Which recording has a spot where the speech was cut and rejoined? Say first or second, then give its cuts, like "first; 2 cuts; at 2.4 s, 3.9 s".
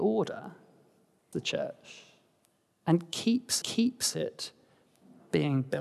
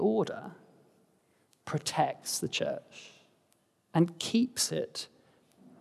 first; 2 cuts; at 1.3 s, 3.6 s